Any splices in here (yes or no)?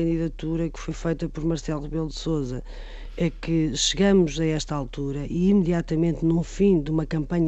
no